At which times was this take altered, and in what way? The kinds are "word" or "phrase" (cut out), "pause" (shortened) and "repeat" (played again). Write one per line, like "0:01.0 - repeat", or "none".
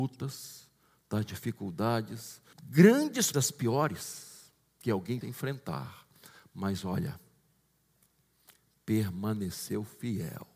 0:02.5 - word
0:03.3 - phrase
0:04.6 - pause
0:05.2 - word